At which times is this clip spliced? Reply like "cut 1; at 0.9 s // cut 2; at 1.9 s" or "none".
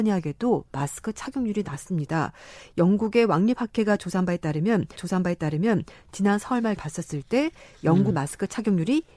cut 1; at 5.0 s // cut 2; at 6.8 s // cut 3; at 8.1 s